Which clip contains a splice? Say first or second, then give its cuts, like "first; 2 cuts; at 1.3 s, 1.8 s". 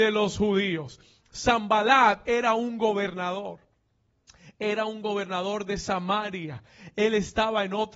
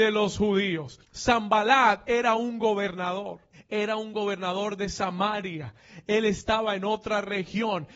second; 2 cuts; at 1.0 s, 3.5 s